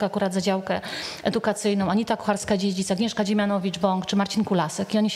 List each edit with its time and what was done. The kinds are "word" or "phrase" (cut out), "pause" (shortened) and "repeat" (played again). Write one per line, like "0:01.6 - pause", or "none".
none